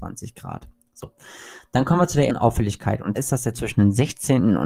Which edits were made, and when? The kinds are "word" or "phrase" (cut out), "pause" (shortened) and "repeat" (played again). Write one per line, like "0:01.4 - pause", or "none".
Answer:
0:02.3 - word
0:03.1 - word
0:03.5 - word

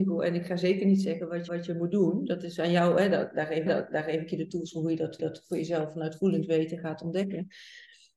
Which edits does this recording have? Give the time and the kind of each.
0:01.5 - repeat
0:03.7 - repeat
0:05.2 - repeat

